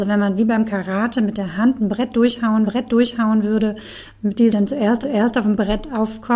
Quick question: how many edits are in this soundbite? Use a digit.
3